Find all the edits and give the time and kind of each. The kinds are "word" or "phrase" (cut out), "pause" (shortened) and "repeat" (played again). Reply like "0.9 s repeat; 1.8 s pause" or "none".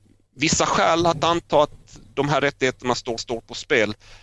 3.2 s repeat